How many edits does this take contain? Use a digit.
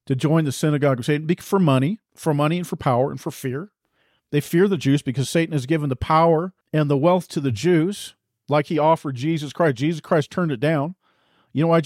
2